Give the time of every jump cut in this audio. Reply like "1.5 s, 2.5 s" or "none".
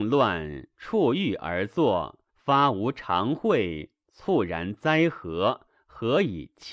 2.3 s